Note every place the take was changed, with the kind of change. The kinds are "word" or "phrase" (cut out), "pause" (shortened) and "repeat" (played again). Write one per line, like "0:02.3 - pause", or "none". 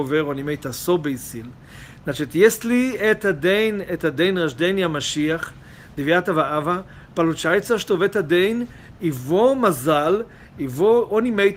none